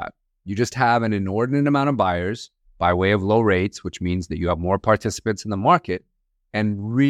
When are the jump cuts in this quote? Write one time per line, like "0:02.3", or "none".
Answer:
none

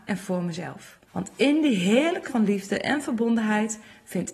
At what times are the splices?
0:01.1
0:02.3

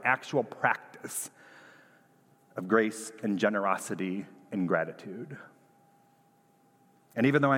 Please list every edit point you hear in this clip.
none

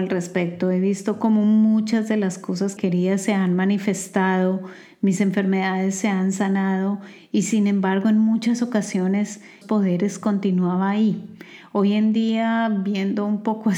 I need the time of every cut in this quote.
0:02.8
0:09.6

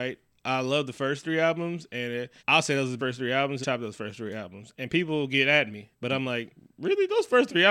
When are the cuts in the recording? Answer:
0:02.4
0:03.0
0:03.6
0:05.9

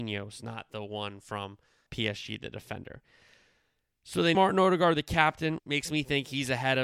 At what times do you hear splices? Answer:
0:01.9
0:04.3
0:05.6

